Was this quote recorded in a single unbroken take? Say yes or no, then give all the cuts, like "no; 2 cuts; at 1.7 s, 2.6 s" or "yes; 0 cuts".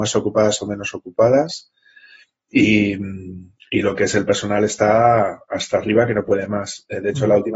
yes; 0 cuts